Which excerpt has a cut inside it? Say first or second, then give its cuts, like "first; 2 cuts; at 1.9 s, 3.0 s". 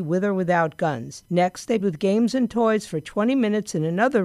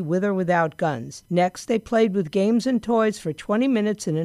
first; 1 cut; at 1.8 s